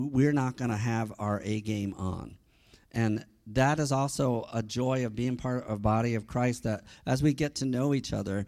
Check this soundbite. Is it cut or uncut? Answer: uncut